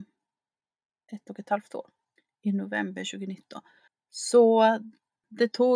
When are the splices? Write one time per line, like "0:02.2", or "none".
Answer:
0:02.2
0:03.9

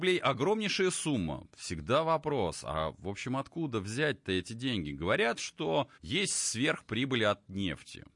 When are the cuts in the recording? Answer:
0:05.9

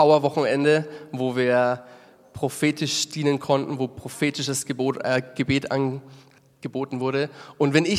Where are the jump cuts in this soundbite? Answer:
none

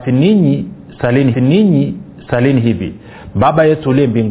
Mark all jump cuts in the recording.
0:01.3

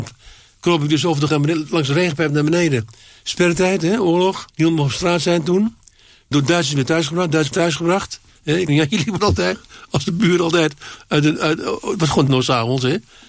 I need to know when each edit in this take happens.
0:01.3
0:04.5
0:06.3
0:07.5
0:08.7
0:09.2
0:12.3

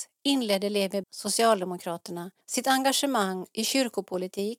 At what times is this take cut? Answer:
0:01.0
0:02.4

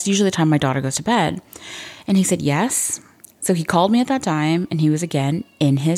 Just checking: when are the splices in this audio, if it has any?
none

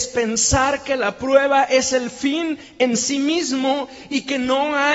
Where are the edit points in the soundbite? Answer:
none

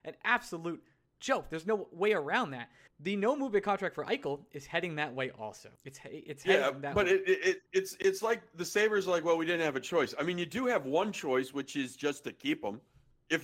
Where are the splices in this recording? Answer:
0:02.9
0:05.8
0:07.7

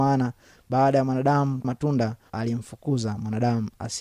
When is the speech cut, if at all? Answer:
0:01.6
0:02.3

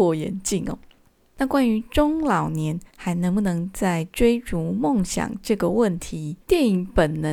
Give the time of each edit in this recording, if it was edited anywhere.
0:02.9
0:06.4

